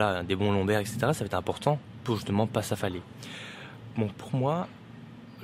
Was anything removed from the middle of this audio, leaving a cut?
no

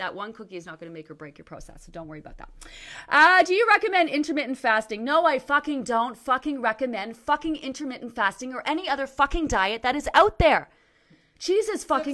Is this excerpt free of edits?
yes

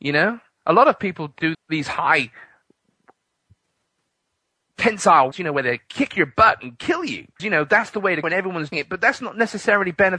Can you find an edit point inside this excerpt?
yes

